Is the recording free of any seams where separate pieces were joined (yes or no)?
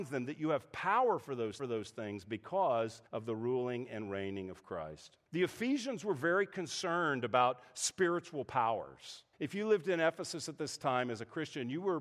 no